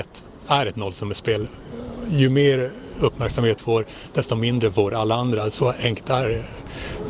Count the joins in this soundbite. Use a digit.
1